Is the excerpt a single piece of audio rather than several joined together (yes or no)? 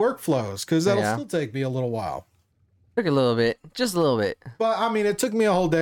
yes